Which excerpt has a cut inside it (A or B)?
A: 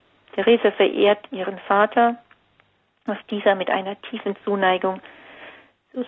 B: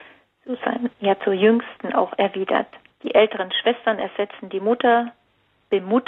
B